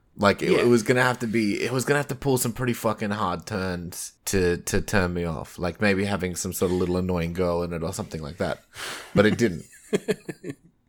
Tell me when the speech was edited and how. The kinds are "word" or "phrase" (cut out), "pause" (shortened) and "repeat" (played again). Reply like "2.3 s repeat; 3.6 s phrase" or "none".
4.2 s pause